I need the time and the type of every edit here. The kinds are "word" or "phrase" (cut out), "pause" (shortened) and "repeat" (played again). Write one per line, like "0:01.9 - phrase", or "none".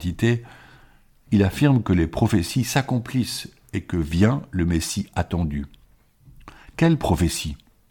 none